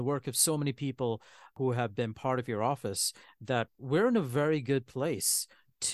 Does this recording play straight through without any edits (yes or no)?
yes